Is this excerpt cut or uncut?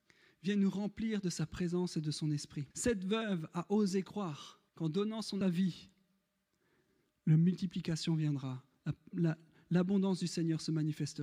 cut